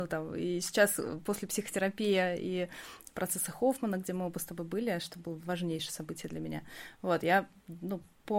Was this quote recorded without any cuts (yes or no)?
yes